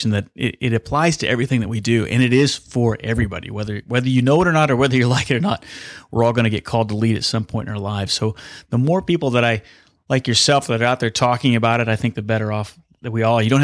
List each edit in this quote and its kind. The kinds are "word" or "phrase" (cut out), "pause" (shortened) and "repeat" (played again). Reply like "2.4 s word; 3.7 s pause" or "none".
none